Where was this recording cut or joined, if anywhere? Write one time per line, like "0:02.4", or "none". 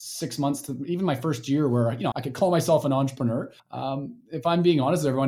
0:02.1
0:03.6